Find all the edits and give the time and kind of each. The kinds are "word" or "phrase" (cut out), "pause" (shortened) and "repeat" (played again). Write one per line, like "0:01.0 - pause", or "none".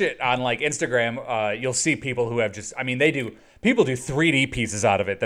none